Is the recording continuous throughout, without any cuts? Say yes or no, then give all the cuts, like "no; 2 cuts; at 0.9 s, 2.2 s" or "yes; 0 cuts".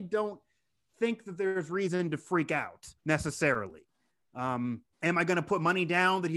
no; 2 cuts; at 3.0 s, 4.9 s